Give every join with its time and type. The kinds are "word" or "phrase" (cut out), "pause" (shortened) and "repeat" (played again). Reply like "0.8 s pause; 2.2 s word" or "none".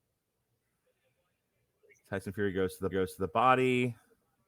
2.9 s repeat

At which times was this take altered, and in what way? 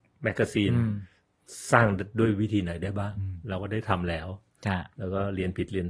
4.9 s pause

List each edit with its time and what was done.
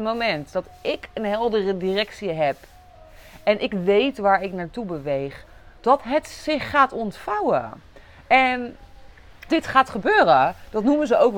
9.5 s word

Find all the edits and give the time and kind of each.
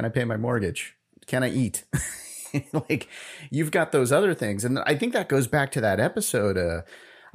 none

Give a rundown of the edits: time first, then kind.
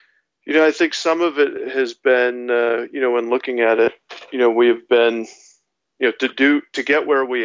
none

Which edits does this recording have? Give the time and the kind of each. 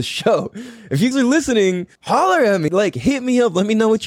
1.1 s word; 1.9 s pause; 2.7 s word

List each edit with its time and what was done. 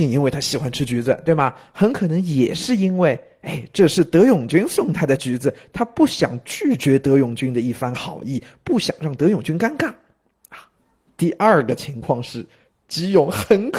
none

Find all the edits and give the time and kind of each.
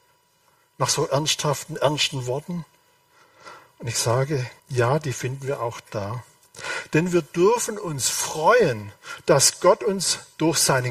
4.6 s pause

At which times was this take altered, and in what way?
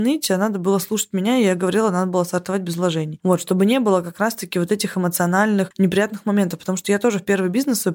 none

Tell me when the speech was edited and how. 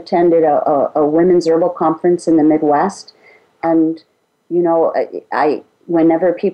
none

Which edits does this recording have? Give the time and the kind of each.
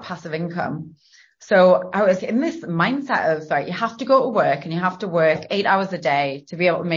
2.2 s word

